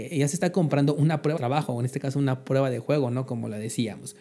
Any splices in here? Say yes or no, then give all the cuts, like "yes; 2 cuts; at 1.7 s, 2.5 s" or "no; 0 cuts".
yes; 1 cut; at 1.4 s